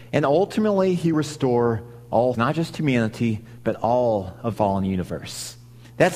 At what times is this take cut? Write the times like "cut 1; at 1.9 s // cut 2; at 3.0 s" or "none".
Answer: cut 1; at 1.1 s // cut 2; at 2.3 s // cut 3; at 4.5 s